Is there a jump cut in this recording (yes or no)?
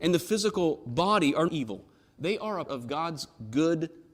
yes